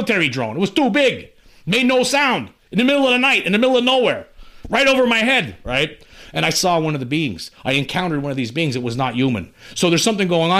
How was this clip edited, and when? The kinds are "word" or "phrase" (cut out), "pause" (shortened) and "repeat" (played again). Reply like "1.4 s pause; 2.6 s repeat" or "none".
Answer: none